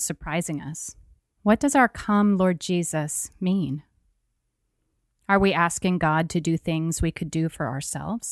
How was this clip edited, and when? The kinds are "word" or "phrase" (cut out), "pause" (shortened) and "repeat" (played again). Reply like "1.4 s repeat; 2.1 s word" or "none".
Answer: 1.2 s pause

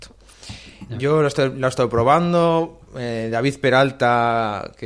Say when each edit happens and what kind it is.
2.9 s pause

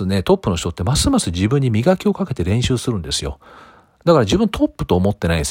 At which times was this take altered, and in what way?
none

